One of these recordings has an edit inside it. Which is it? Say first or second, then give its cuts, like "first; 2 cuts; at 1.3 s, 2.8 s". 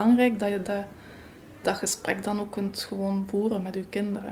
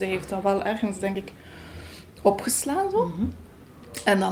first; 1 cut; at 1.6 s